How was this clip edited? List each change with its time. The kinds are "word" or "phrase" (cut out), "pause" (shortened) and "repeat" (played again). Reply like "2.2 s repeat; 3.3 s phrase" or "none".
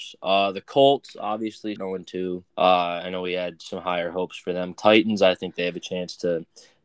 1.8 s word; 2.5 s pause; 4.7 s phrase